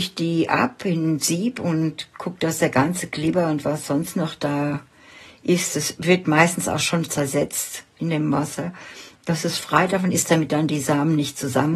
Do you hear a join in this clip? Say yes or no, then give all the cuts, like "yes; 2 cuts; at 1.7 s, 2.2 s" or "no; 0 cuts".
no; 0 cuts